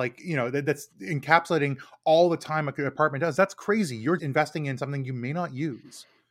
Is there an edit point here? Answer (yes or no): yes